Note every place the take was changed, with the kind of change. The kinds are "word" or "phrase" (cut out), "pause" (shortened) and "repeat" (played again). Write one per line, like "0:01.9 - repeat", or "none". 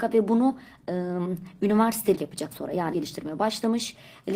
0:02.2 - word
0:02.5 - word
0:02.9 - word